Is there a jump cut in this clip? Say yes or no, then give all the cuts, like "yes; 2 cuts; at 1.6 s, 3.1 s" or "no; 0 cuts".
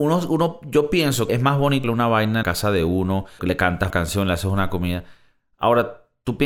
yes; 5 cuts; at 1.3 s, 1.8 s, 2.4 s, 3.4 s, 3.9 s